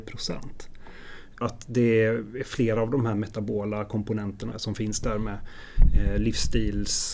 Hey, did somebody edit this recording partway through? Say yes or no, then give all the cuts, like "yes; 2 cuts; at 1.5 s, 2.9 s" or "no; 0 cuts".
yes; 2 cuts; at 1.4 s, 4.5 s